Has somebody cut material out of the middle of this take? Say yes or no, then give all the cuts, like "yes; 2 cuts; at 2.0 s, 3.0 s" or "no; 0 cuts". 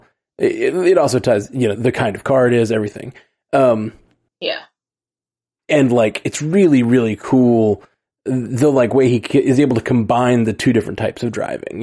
yes; 1 cut; at 1.7 s